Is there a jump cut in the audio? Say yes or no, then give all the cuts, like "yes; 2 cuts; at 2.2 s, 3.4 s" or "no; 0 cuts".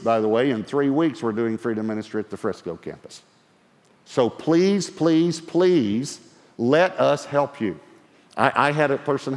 no; 0 cuts